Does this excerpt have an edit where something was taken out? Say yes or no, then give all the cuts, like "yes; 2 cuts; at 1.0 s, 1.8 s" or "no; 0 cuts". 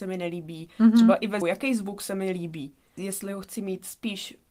yes; 1 cut; at 1.4 s